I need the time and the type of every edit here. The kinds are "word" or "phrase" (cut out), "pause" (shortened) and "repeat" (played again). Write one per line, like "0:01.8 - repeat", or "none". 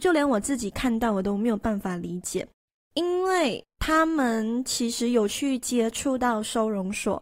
0:02.7 - pause
0:03.7 - pause